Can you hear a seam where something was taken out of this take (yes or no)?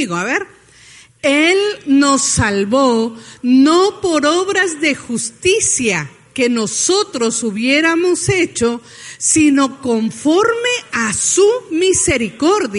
no